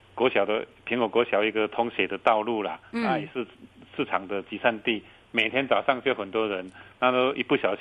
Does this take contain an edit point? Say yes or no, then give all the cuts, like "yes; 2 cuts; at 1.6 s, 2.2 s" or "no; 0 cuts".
no; 0 cuts